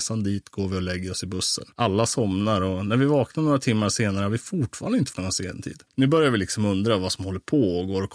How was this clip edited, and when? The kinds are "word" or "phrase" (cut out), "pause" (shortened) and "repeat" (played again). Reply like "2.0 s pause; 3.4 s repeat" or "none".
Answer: 1.7 s pause; 5.1 s word; 5.9 s pause